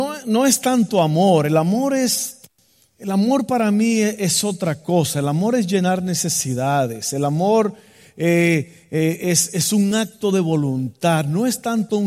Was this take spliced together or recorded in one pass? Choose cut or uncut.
uncut